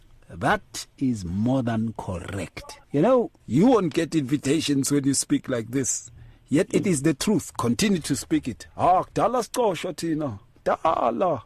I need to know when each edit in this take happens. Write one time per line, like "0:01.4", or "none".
0:02.8
0:03.4